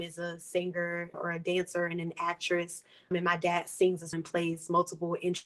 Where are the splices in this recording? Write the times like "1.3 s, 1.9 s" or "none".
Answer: 1.1 s, 3.1 s, 4.1 s

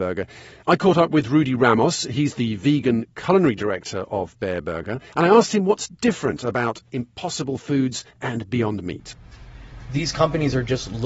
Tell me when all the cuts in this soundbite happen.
5.1 s, 8.1 s

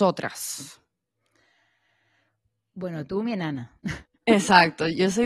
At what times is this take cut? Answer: 4.1 s

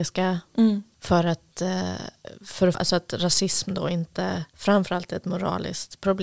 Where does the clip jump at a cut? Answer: 2.7 s, 4.5 s

